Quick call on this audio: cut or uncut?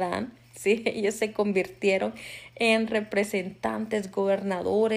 uncut